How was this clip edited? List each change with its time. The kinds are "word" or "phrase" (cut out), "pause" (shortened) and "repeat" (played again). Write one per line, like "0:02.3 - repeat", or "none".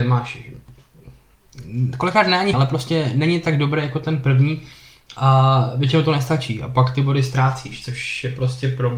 0:02.5 - word

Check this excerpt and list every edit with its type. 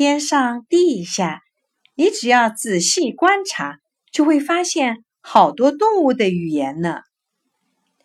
none

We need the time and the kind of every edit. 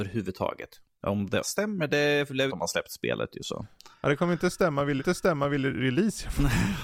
0:01.4 - phrase
0:02.5 - phrase
0:05.0 - repeat

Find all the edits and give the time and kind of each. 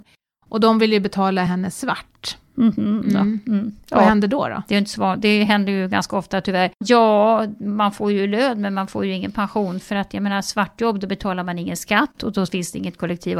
none

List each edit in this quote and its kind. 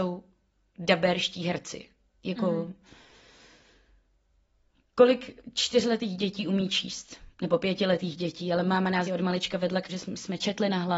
0:09.1 - word
0:09.9 - word

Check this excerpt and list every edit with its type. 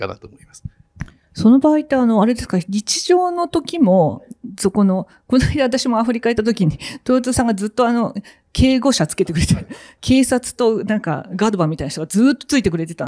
none

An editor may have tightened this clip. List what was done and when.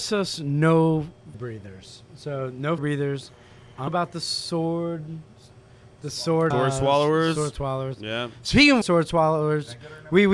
0:01.3 - word
0:02.8 - word
0:03.9 - word
0:06.5 - word
0:08.8 - word

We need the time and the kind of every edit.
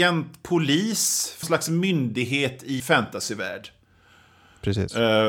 0:01.4 - word
0:02.8 - word

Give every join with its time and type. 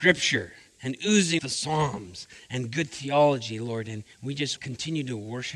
0:01.4 - word
0:04.1 - pause
0:04.6 - word

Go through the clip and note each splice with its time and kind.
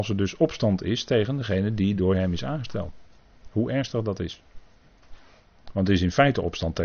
none

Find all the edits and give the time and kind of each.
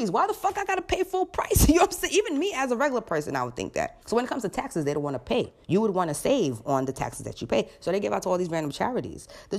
0:04.0 - pause
0:05.6 - pause

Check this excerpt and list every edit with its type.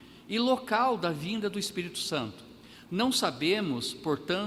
none

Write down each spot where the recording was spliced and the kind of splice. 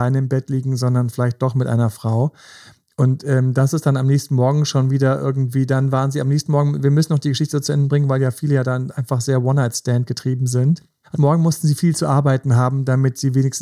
0:11.1 - word

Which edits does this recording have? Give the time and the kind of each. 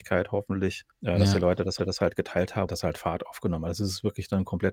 0:00.9 - pause
0:01.8 - repeat
0:02.7 - phrase

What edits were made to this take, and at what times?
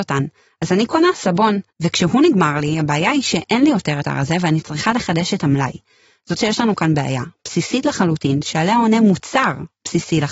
0:01.7 - pause
0:04.0 - word
0:06.4 - word

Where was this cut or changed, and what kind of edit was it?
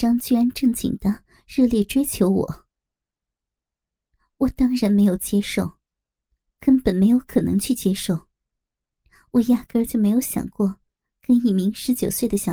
none

